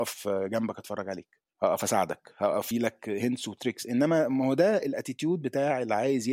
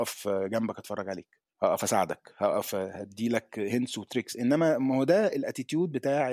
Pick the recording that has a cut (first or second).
first